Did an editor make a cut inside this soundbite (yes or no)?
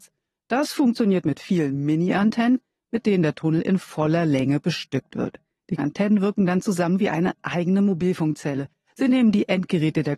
yes